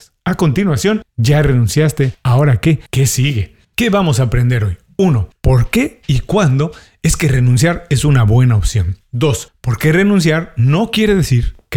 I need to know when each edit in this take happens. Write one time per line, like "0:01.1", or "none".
0:02.9
0:03.6

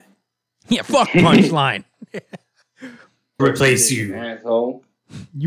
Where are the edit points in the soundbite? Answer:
0:03.4

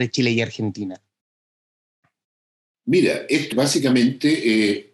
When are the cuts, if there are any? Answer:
0:03.5

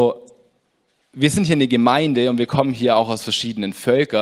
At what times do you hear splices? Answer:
none

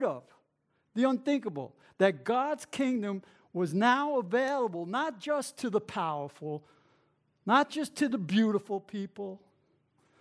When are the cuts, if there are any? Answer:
none

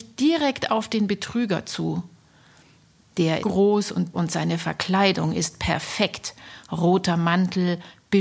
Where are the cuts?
0:03.4
0:04.1

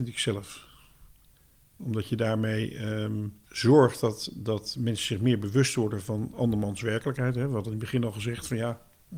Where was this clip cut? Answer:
0:03.4

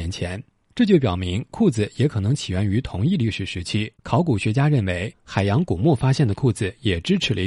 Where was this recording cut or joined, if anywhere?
0:03.9

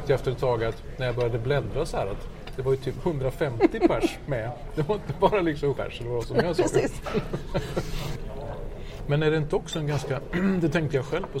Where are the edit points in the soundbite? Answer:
0:05.7

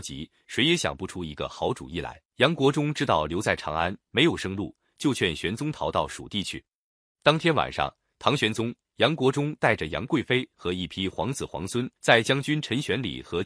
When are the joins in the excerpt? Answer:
0:02.3
0:12.0

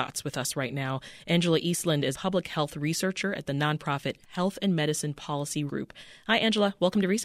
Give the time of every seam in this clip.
0:02.1
0:05.7

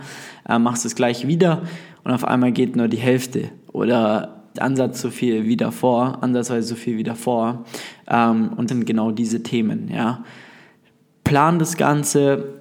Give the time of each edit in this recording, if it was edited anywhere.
0:04.6
0:05.4
0:08.7

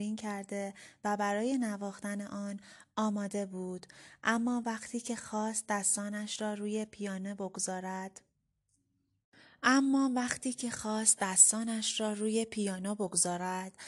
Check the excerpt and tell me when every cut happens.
none

